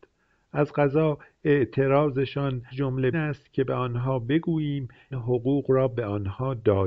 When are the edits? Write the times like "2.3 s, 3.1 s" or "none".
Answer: 2.7 s, 3.1 s, 5.1 s